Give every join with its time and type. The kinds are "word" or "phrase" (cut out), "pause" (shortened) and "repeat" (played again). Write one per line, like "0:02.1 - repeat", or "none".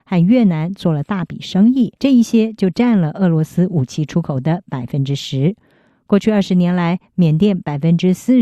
0:02.0 - pause